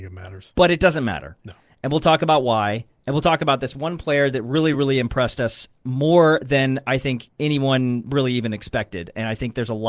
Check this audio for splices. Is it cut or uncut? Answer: uncut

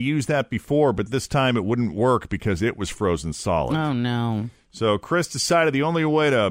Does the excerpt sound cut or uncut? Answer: cut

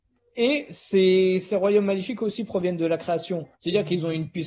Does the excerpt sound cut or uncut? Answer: cut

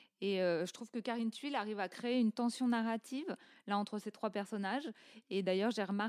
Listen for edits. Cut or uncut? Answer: uncut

